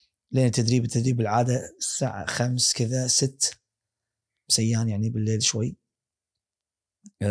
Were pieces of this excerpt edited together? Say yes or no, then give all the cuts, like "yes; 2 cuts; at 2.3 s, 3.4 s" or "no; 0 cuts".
no; 0 cuts